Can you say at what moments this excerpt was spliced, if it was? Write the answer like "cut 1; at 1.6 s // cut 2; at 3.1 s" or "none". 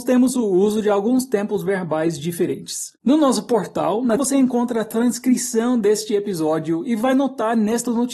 cut 1; at 3.0 s // cut 2; at 4.2 s